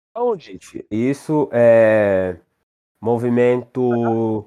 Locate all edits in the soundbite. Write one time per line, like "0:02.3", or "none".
0:00.9